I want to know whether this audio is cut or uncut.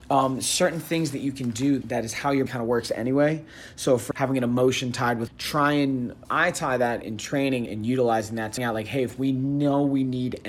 cut